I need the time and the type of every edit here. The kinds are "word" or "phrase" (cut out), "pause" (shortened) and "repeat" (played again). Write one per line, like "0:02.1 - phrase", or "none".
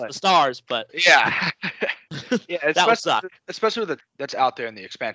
0:03.4 - pause
0:04.0 - word